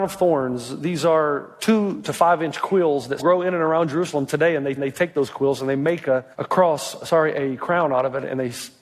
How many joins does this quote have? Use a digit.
3